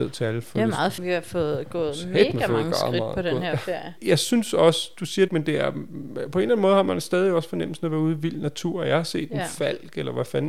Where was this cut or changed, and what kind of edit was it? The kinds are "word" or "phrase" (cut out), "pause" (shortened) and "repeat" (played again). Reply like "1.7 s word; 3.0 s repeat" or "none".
1.0 s word; 5.3 s phrase